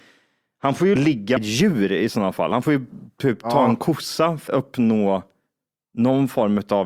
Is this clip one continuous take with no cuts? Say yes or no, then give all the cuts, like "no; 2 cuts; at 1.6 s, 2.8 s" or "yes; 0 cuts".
no; 3 cuts; at 1.0 s, 1.4 s, 4.5 s